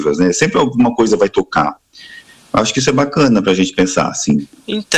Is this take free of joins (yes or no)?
yes